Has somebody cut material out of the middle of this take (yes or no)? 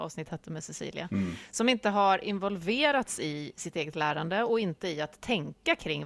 no